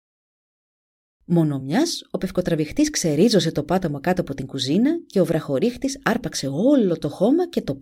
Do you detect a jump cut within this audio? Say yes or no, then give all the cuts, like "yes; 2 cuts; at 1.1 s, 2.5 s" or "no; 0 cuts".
no; 0 cuts